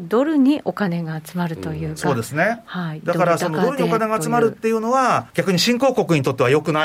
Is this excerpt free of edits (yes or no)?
no